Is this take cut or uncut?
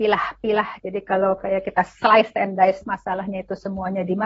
uncut